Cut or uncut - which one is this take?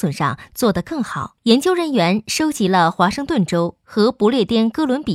cut